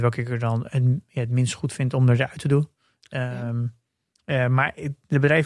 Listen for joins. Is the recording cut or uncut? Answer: uncut